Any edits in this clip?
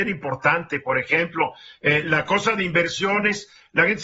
no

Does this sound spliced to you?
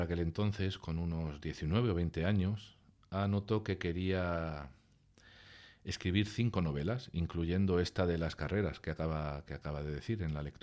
no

